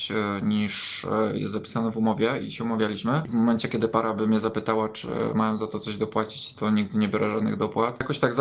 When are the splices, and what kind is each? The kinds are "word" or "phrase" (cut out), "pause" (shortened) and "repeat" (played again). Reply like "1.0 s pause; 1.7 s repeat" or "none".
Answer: none